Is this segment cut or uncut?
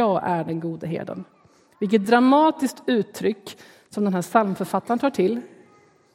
uncut